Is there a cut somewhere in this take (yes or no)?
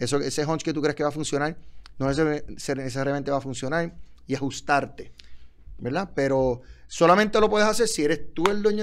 no